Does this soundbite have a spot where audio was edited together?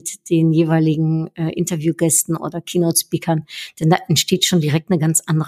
no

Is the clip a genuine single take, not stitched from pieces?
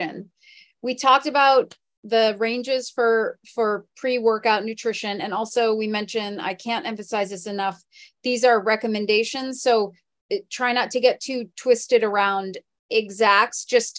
yes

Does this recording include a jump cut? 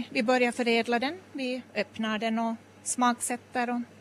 no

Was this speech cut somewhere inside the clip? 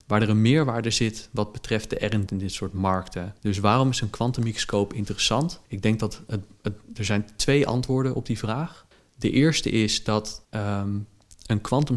yes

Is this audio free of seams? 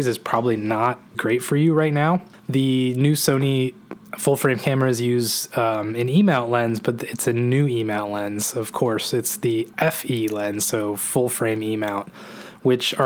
no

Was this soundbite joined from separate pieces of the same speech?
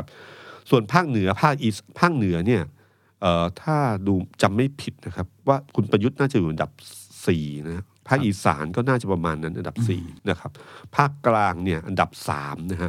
yes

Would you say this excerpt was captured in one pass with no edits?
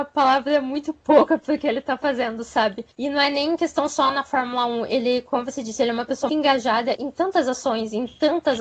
no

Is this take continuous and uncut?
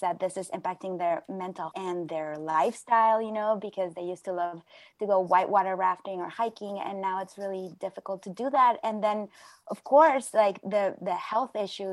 no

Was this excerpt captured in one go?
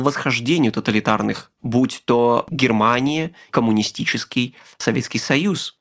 no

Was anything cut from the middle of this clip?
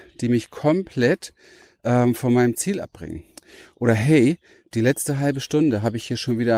no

